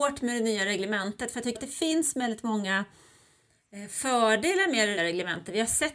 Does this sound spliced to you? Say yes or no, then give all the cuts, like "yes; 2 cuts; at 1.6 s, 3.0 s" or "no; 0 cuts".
yes; 2 cuts; at 1.5 s, 5.0 s